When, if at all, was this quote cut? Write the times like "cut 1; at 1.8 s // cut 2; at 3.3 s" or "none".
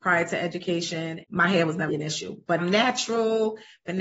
cut 1; at 1.2 s // cut 2; at 1.9 s // cut 3; at 2.6 s